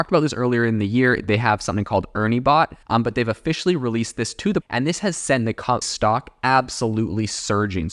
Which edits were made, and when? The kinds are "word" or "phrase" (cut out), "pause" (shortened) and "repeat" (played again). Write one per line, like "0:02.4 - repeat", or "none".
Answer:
0:02.8 - pause
0:04.6 - word
0:05.8 - phrase